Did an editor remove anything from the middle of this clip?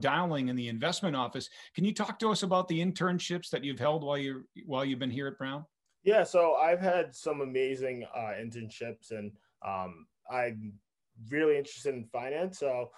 yes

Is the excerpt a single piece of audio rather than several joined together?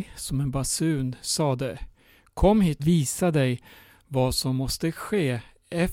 no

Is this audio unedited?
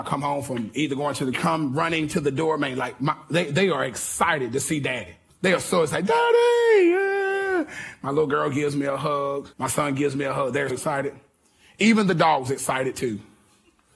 no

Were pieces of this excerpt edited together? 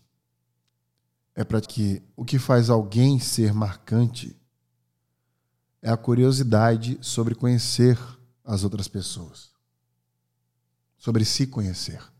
yes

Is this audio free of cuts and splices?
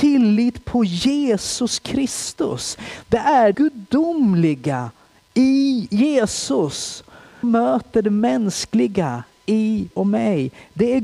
no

